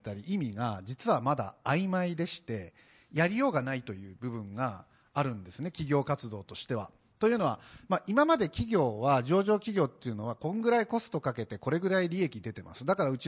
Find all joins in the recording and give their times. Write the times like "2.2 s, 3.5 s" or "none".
none

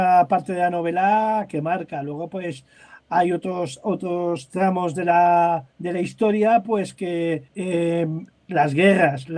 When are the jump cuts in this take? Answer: 5.7 s, 7.5 s

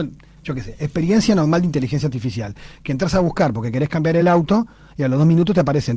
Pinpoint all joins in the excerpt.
none

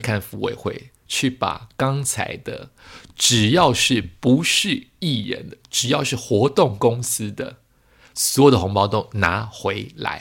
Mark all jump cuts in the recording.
none

